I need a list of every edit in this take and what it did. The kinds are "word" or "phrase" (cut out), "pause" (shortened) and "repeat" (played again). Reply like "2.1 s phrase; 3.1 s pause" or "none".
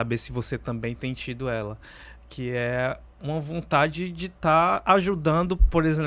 none